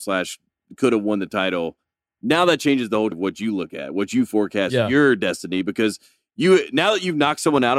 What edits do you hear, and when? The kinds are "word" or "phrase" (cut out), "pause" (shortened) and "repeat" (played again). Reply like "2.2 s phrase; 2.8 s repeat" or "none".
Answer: 3.1 s word